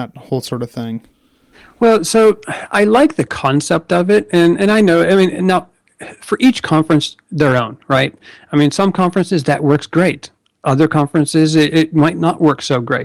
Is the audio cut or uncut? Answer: uncut